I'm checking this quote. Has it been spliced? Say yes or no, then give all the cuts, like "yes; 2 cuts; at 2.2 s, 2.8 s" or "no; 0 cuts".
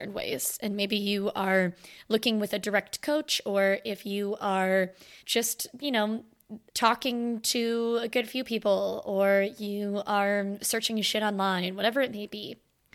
yes; 2 cuts; at 5.2 s, 6.7 s